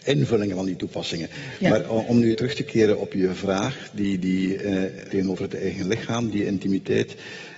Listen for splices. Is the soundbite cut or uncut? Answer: cut